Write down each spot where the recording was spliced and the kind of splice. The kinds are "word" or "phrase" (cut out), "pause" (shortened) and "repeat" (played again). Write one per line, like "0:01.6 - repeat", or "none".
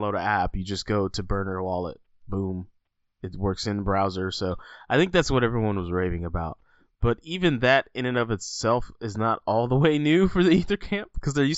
none